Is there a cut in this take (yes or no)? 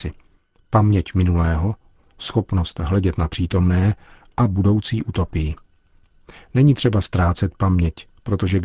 no